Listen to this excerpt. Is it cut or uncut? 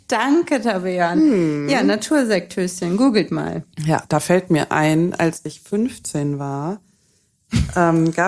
cut